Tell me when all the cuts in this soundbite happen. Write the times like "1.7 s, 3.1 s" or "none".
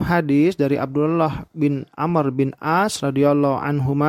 none